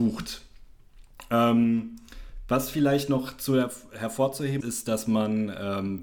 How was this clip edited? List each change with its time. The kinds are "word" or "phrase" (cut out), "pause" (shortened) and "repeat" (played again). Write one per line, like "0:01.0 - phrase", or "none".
0:04.6 - word